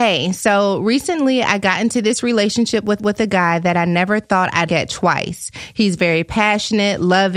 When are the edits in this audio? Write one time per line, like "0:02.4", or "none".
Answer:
0:03.0
0:04.7